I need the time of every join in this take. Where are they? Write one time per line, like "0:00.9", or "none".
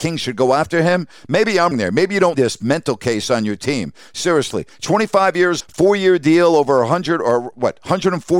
0:01.7
0:02.3
0:05.6